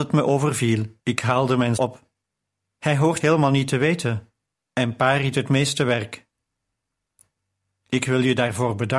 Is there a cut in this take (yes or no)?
yes